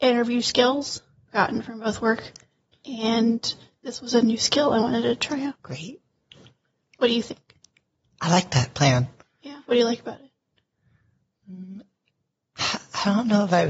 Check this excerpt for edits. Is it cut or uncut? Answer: cut